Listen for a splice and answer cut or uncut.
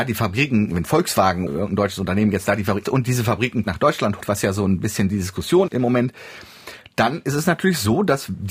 cut